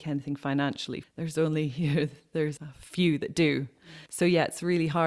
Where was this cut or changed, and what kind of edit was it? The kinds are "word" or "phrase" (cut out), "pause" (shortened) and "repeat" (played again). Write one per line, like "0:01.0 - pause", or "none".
0:01.0 - phrase
0:02.6 - word
0:04.1 - pause

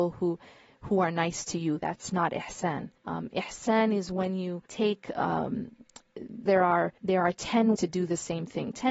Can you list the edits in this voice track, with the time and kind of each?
0:03.0 - pause
0:04.7 - pause
0:06.5 - word
0:07.0 - pause
0:07.7 - word

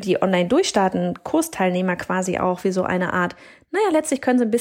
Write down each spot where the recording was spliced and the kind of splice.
none

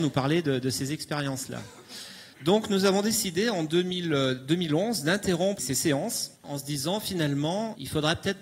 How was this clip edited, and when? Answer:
0:02.3 - pause
0:05.6 - word
0:06.4 - pause

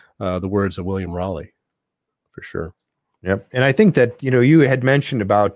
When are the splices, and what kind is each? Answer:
none

